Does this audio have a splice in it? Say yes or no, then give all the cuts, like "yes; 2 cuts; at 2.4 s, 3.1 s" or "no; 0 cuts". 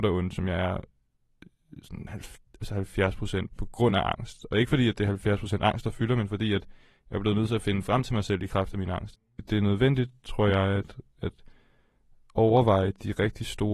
no; 0 cuts